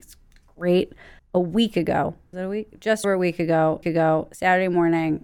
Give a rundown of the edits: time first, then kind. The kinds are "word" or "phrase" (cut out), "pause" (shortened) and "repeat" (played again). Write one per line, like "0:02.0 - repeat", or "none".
0:01.2 - pause
0:02.3 - word
0:03.0 - word
0:03.8 - repeat